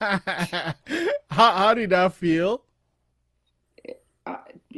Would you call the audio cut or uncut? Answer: uncut